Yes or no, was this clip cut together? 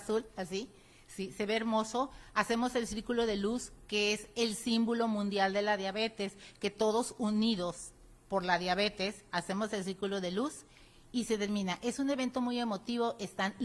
no